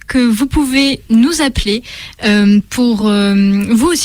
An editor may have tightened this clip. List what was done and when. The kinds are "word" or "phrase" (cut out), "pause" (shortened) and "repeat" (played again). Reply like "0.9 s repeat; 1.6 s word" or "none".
none